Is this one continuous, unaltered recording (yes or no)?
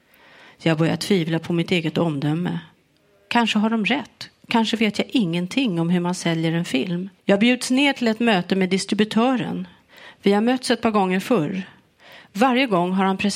no